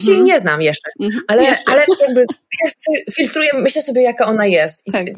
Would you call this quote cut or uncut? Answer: uncut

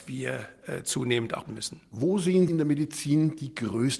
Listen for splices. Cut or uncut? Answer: cut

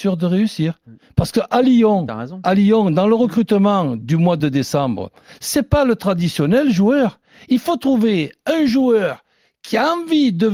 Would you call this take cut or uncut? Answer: uncut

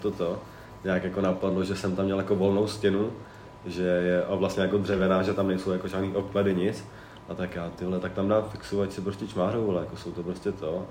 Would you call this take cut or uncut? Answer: uncut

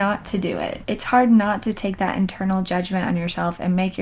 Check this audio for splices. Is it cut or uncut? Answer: uncut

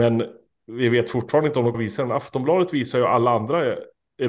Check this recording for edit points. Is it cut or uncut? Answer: cut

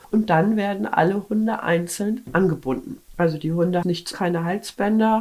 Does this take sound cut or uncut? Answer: cut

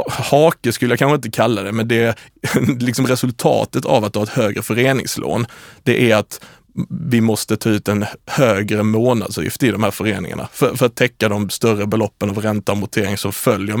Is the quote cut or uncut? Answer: uncut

